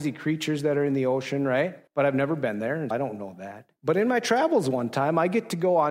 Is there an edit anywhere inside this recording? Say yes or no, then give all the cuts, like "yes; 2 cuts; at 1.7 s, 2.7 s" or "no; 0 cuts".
yes; 3 cuts; at 1.9 s, 2.9 s, 3.8 s